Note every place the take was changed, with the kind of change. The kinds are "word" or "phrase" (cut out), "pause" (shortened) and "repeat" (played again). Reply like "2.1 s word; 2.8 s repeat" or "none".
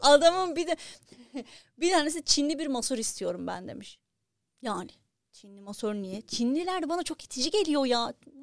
4.3 s pause